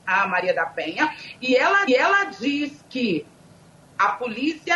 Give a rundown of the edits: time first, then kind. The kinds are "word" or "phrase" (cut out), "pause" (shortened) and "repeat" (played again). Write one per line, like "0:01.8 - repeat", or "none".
0:01.9 - repeat